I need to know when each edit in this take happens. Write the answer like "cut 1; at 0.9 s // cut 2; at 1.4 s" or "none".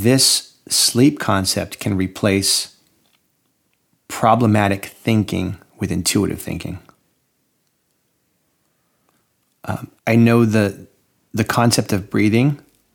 cut 1; at 10.0 s

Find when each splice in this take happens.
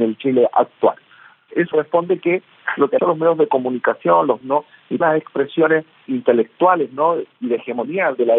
cut 1; at 1.7 s // cut 2; at 3.0 s // cut 3; at 4.4 s // cut 4; at 5.0 s

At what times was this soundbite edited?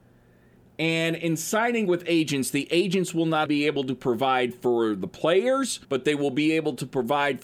cut 1; at 3.5 s // cut 2; at 5.8 s

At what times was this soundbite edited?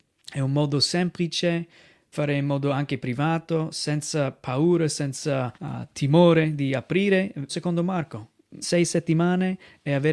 cut 1; at 2.1 s // cut 2; at 5.5 s // cut 3; at 7.5 s // cut 4; at 8.6 s

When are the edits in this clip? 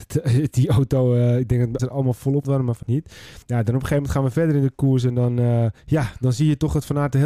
cut 1; at 1.8 s // cut 2; at 2.4 s // cut 3; at 2.8 s // cut 4; at 3.4 s // cut 5; at 5.8 s

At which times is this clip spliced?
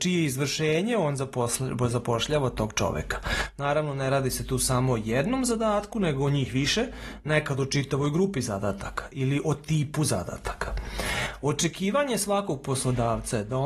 none

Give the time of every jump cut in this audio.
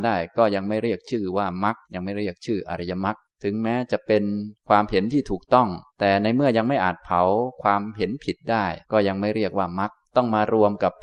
cut 1; at 1.8 s // cut 2; at 3.2 s // cut 3; at 5.9 s // cut 4; at 8.8 s // cut 5; at 10.0 s

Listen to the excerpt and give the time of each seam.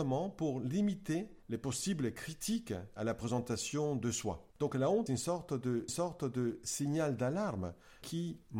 cut 1; at 1.4 s // cut 2; at 3.0 s // cut 3; at 4.5 s // cut 4; at 5.1 s // cut 5; at 5.9 s

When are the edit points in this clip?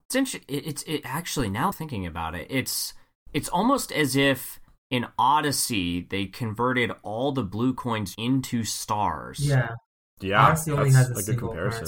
cut 1; at 1.7 s // cut 2; at 3.2 s // cut 3; at 8.1 s

